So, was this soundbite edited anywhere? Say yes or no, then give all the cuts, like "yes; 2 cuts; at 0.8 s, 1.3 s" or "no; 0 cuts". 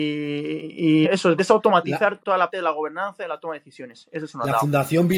yes; 4 cuts; at 1.0 s, 1.4 s, 2.2 s, 2.5 s